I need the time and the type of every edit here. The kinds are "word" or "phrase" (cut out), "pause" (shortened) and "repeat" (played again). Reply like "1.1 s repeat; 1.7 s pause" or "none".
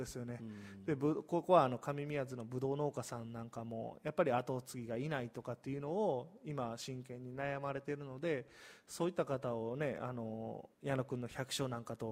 10.7 s pause